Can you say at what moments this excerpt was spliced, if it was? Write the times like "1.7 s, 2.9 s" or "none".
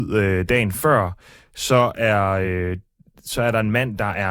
none